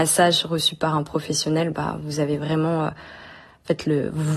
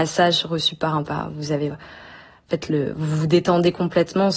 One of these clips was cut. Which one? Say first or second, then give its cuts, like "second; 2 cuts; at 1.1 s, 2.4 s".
second; 2 cuts; at 1.0 s, 1.7 s